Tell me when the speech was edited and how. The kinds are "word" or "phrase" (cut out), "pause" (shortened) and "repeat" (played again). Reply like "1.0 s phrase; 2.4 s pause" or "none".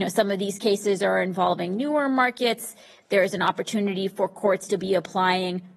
none